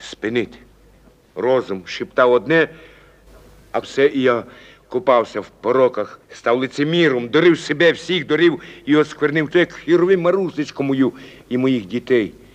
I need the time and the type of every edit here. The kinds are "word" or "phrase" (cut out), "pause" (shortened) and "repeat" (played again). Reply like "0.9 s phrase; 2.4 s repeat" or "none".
3.8 s phrase; 6.2 s pause; 9.5 s word